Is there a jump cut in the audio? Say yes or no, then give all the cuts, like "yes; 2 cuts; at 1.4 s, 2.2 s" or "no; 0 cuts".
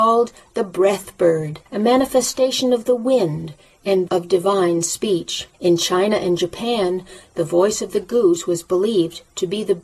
yes; 3 cuts; at 1.7 s, 4.1 s, 5.5 s